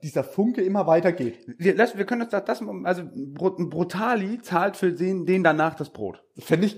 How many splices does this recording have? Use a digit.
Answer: 0